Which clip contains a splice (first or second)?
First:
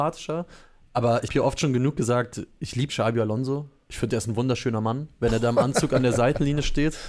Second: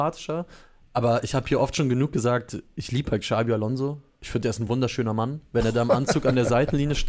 first